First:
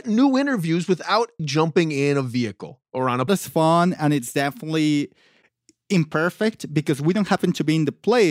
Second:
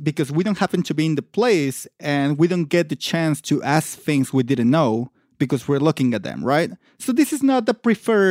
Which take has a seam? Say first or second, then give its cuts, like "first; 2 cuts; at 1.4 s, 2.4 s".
first; 3 cuts; at 1.4 s, 2.8 s, 3.3 s